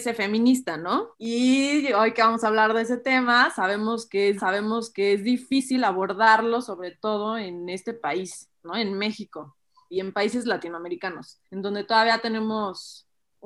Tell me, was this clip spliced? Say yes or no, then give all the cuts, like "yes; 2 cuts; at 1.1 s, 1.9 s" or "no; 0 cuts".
yes; 4 cuts; at 1.1 s, 4.4 s, 9.9 s, 11.4 s